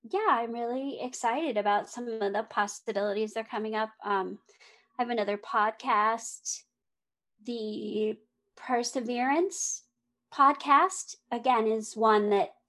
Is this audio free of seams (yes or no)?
yes